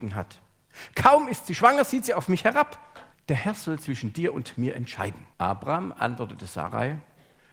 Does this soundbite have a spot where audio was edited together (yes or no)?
yes